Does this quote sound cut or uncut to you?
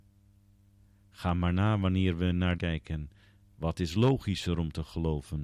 cut